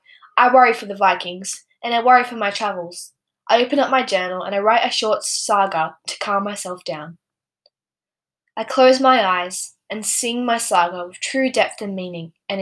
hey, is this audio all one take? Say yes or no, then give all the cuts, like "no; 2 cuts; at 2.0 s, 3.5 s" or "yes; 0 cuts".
yes; 0 cuts